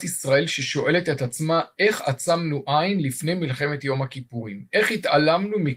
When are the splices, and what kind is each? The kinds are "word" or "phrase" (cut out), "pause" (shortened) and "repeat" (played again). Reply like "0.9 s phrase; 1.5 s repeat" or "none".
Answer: none